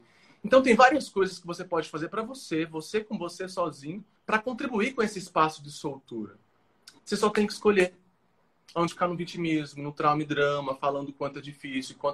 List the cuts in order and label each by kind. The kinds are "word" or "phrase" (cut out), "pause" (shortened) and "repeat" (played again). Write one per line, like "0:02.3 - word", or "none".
0:04.2 - pause
0:08.9 - word